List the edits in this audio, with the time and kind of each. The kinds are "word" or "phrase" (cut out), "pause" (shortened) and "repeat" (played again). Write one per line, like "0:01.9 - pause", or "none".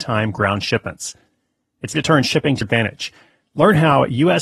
0:01.9 - word
0:02.6 - word